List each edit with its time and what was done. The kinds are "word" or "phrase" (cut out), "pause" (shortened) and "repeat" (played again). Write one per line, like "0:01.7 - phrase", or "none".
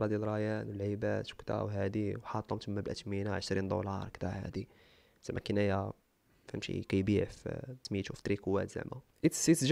none